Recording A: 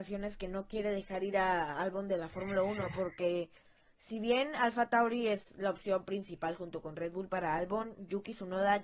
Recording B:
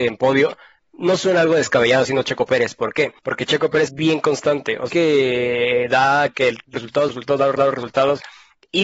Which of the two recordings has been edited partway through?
B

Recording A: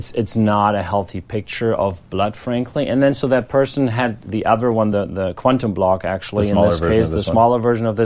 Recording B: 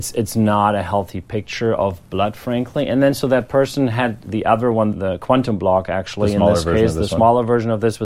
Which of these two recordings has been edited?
B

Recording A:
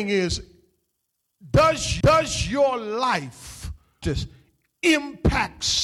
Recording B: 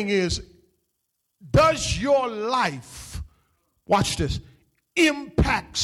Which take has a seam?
A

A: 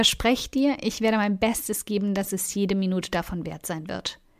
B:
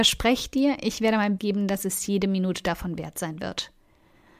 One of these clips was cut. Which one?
B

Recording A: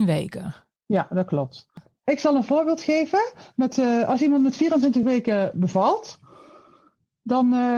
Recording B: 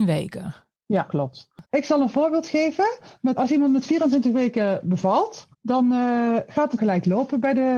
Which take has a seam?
B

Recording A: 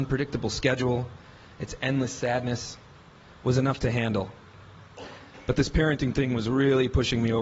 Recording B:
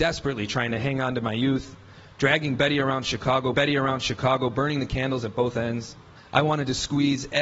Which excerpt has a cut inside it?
B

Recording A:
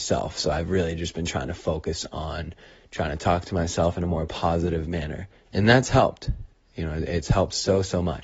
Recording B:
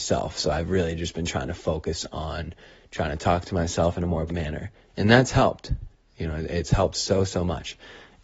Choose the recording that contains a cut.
B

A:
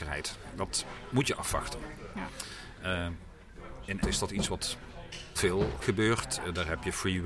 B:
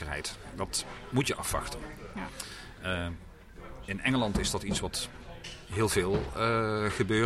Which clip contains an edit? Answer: A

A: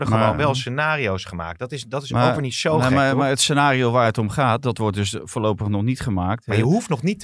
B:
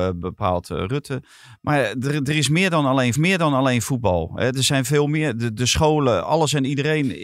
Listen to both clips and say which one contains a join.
B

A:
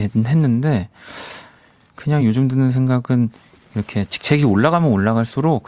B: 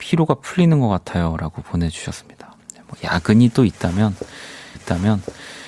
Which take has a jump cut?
B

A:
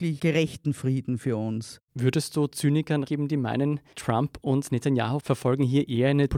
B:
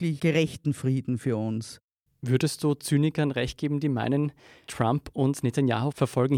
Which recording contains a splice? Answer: A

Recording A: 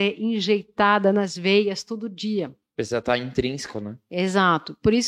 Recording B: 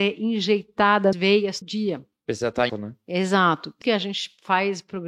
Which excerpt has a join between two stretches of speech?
B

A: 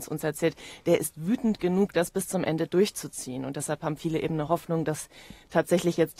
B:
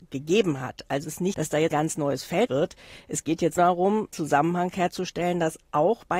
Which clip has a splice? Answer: B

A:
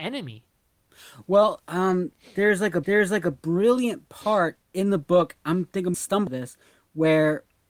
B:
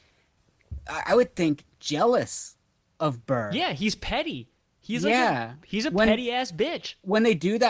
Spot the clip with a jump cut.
A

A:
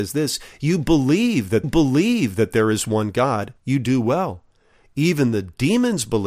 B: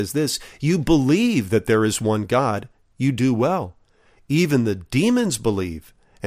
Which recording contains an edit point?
A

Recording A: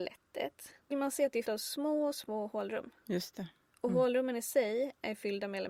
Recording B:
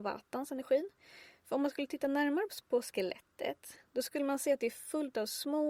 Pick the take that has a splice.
A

